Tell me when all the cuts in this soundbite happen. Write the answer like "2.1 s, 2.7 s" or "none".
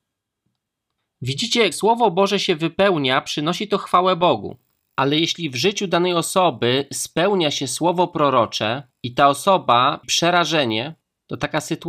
1.7 s, 10.0 s